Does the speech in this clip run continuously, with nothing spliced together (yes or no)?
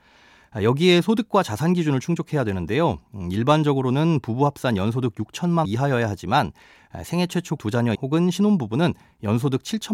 no